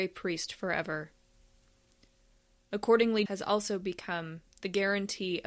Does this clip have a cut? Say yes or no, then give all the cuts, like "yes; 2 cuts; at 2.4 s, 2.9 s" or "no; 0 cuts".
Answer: yes; 1 cut; at 3.3 s